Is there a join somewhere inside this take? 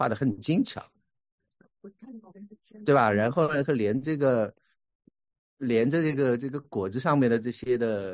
no; 0 cuts

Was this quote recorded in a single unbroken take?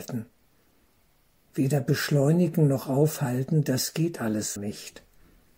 no; 1 cut; at 4.6 s

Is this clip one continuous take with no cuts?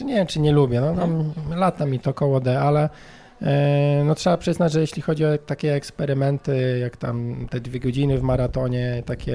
yes; 0 cuts

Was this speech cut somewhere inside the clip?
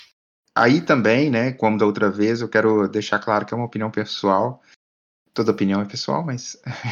no; 0 cuts

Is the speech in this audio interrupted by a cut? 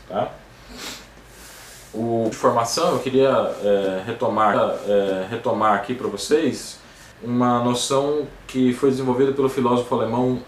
yes; 3 cuts; at 2.3 s, 4.5 s, 7.1 s

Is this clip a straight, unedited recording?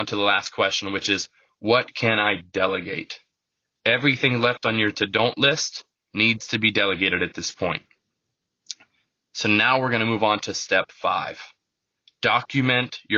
yes; 0 cuts

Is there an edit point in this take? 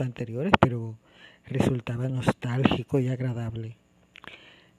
no; 0 cuts

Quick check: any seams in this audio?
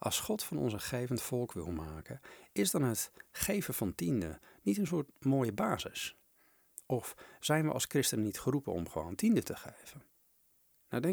no; 0 cuts

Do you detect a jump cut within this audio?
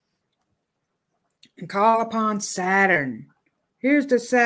no; 0 cuts

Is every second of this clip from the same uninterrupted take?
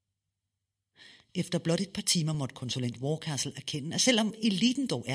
yes; 0 cuts

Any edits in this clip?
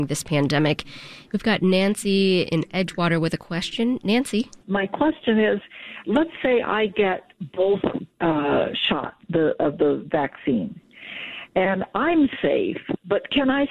yes; 2 cuts; at 4.6 s, 9.2 s

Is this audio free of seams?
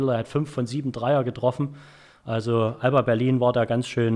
yes; 0 cuts

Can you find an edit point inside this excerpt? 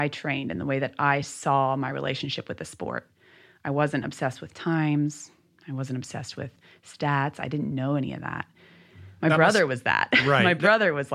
no; 0 cuts

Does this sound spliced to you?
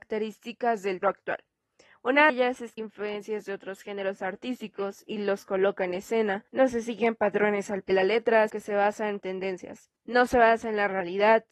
yes; 8 cuts; at 1.0 s, 2.3 s, 2.8 s, 6.5 s, 7.9 s, 8.5 s, 9.2 s, 10.0 s

